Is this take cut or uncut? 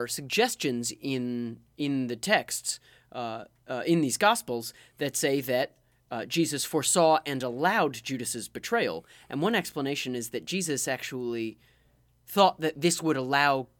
uncut